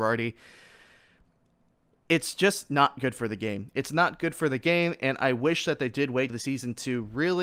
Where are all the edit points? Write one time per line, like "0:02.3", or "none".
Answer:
0:06.3